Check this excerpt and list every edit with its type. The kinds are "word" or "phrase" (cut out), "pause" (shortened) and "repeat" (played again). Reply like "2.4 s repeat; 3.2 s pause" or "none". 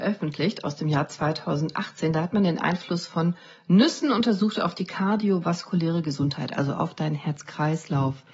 none